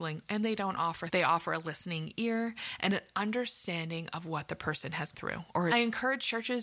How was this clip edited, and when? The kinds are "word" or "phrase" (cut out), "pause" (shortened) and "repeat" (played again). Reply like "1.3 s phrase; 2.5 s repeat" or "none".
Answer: 1.1 s word; 5.1 s word; 5.7 s phrase